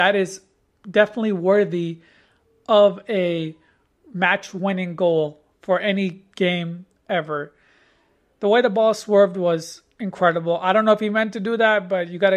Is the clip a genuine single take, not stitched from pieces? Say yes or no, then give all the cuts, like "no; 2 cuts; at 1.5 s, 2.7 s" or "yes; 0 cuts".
yes; 0 cuts